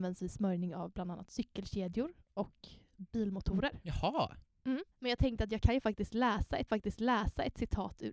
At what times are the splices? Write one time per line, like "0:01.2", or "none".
0:04.9
0:06.7